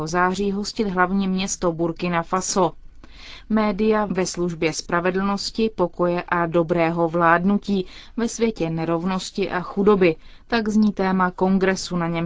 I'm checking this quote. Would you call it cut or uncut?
uncut